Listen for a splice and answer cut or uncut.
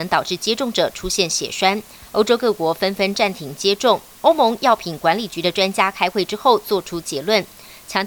cut